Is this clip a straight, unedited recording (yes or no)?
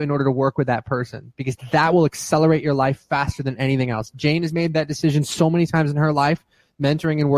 yes